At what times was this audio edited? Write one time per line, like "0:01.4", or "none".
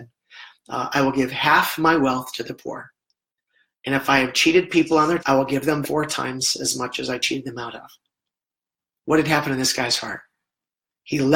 0:05.2
0:05.8

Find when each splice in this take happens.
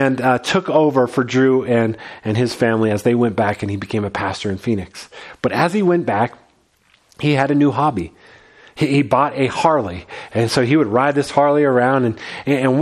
none

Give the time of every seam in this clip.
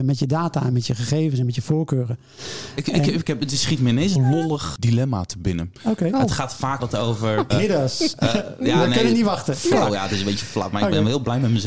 0:04.2
0:04.8
0:06.8
0:07.5

